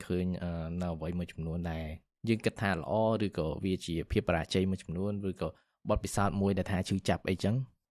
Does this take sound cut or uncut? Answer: uncut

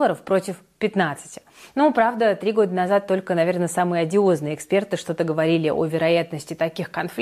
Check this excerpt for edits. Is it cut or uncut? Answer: uncut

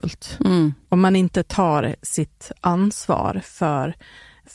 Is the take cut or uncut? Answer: uncut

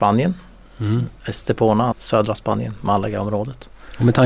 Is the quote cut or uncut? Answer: cut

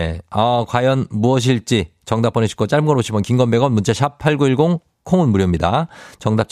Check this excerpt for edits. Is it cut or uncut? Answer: uncut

